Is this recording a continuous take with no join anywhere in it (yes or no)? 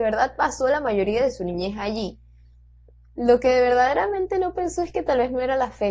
yes